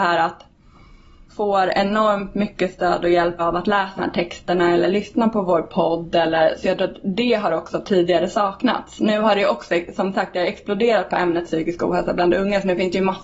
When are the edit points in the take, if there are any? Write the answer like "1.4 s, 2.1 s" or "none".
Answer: 1.3 s, 3.4 s, 4.0 s